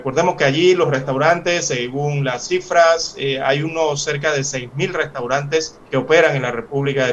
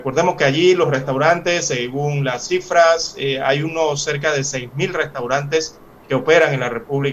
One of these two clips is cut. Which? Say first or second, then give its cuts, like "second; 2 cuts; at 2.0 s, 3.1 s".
first; 1 cut; at 5.8 s